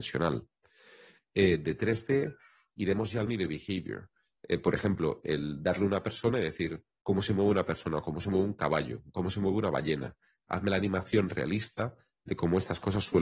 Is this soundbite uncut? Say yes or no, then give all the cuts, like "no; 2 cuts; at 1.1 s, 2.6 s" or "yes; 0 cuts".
no; 1 cut; at 3.3 s